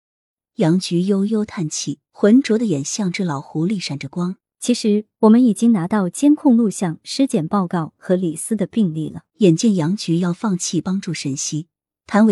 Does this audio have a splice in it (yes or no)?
yes